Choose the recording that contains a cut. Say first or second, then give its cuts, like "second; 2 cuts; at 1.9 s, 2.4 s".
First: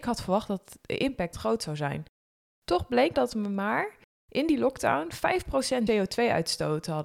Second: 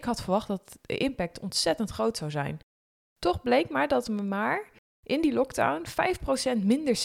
first; 3 cuts; at 1.3 s, 3.1 s, 5.9 s